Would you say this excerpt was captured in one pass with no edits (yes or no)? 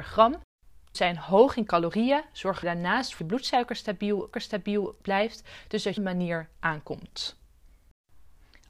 no